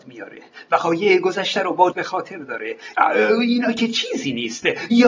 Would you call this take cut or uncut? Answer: cut